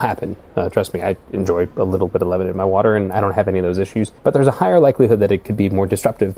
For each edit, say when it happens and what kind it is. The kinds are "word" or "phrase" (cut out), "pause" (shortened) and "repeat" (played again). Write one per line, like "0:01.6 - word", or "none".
0:04.2 - pause

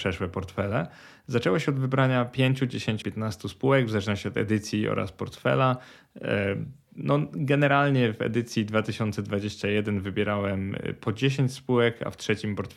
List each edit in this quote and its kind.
0:03.0 - word

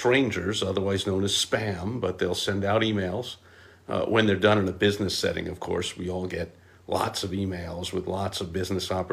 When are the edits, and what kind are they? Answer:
none

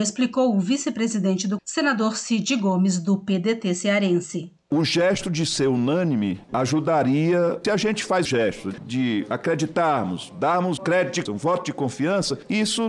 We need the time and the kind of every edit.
0:01.6 - word
0:08.2 - word
0:10.8 - word
0:11.3 - word

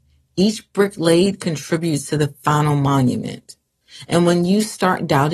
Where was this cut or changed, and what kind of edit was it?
none

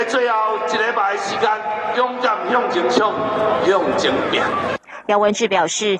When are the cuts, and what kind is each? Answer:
0:01.9 - phrase

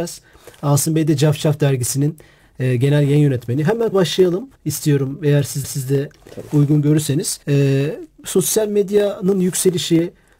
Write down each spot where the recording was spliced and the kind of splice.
0:03.9 - word
0:04.5 - pause
0:05.6 - repeat
0:07.4 - pause

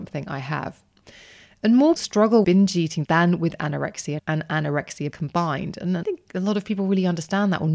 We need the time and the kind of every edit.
0:02.0 - word
0:02.4 - word
0:03.0 - word
0:04.2 - word
0:05.1 - word
0:06.0 - word

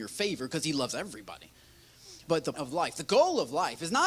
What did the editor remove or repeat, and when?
0:02.2 - word
0:02.5 - word

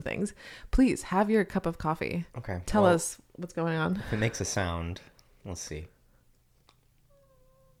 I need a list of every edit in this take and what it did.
none

